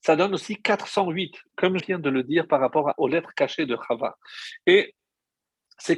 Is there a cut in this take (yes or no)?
yes